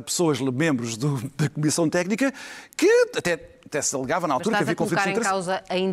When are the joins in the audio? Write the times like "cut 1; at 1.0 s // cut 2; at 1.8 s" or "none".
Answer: none